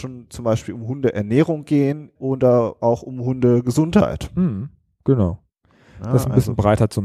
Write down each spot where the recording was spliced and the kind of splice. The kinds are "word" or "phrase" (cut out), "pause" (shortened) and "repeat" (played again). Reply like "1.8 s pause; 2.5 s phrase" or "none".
2.2 s word

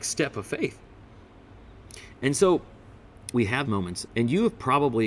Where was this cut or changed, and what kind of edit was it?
3.3 s word; 3.6 s word; 4.1 s word

